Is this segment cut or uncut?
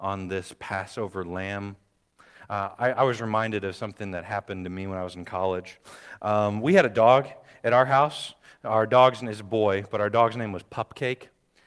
uncut